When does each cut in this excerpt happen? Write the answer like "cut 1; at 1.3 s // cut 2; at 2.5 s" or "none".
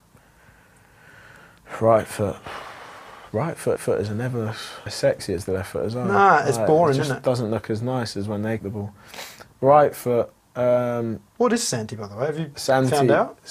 cut 1; at 3.8 s // cut 2; at 4.9 s // cut 3; at 8.6 s // cut 4; at 11.3 s